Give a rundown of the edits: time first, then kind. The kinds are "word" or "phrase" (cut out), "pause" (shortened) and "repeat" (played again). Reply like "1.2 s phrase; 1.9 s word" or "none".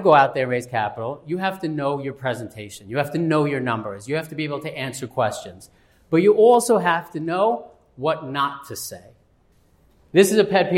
none